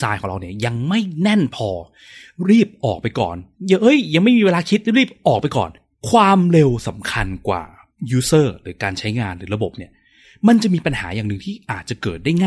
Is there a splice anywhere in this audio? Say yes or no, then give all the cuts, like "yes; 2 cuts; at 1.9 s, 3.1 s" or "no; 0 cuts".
no; 0 cuts